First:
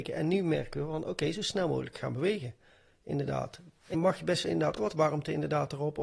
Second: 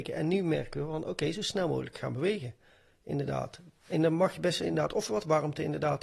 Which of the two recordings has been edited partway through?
first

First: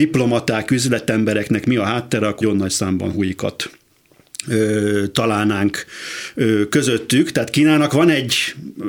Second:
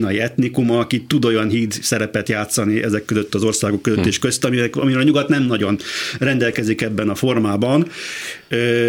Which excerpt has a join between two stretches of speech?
first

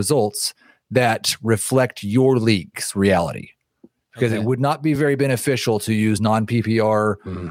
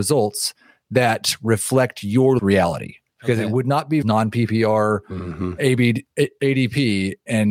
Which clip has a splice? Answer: second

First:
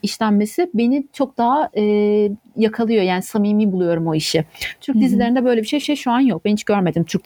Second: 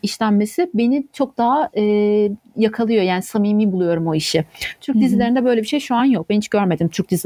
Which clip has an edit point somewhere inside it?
first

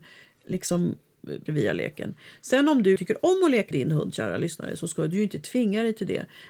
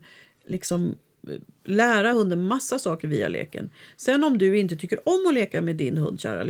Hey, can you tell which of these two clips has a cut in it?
first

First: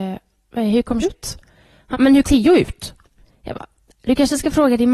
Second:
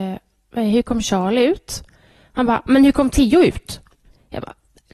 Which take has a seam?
first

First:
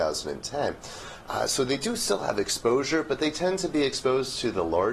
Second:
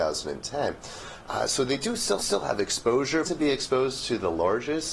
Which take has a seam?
second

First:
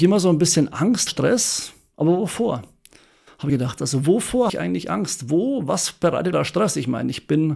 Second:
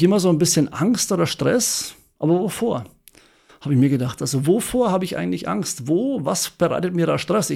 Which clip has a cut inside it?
first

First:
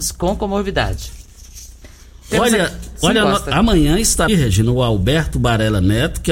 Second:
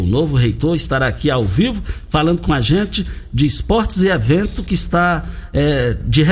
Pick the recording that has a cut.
first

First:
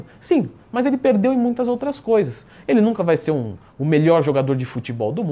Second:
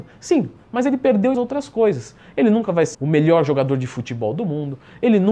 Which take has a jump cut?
second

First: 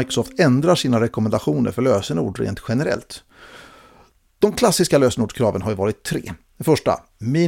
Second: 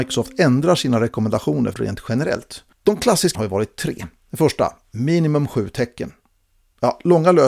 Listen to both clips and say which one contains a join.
second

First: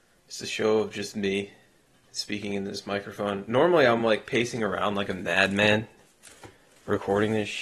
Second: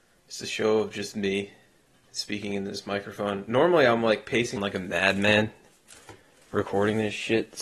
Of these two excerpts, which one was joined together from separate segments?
second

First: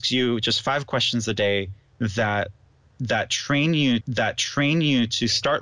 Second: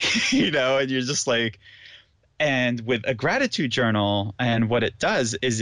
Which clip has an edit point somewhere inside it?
first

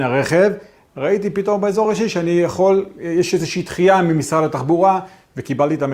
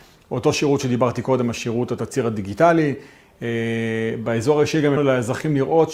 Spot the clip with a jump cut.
second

